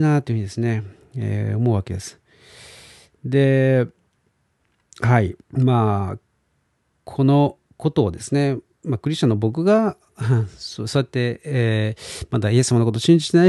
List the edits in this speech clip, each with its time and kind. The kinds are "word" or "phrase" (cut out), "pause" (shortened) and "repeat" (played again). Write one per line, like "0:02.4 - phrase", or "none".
0:05.4 - pause
0:07.6 - pause

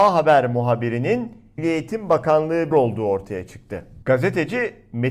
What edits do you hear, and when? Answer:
0:01.6 - word
0:02.7 - phrase
0:04.0 - pause

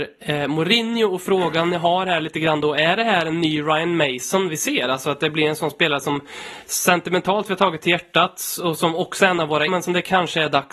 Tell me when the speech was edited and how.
0:09.7 - word

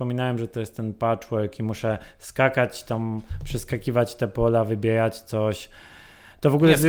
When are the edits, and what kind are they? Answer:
none

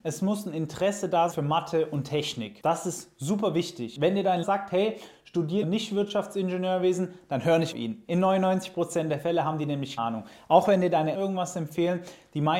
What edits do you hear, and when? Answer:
0:01.3 - word
0:04.4 - word
0:05.6 - word
0:07.7 - word
0:10.0 - word
0:11.1 - word

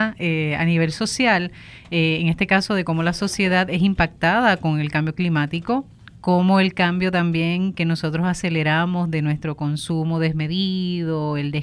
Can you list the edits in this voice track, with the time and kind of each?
none

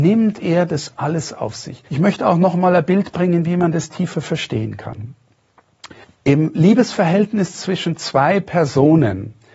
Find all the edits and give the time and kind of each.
0:01.9 - pause
0:06.0 - pause

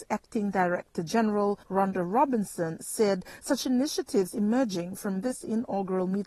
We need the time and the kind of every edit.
0:01.6 - pause

